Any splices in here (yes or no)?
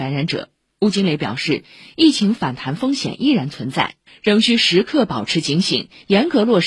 no